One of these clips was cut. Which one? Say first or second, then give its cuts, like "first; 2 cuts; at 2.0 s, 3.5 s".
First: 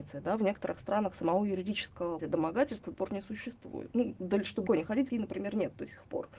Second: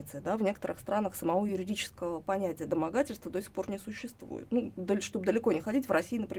first; 4 cuts; at 2.2 s, 2.9 s, 4.7 s, 5.1 s